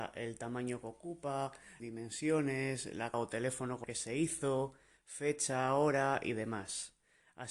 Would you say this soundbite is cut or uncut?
cut